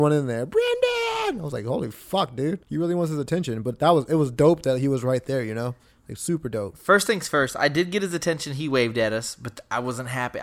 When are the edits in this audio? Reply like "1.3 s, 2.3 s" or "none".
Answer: 2.6 s